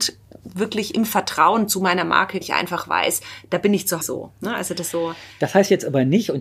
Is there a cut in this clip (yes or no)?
yes